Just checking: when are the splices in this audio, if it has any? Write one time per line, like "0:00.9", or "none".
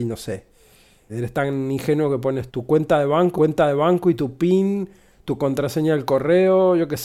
0:01.1
0:02.5
0:03.4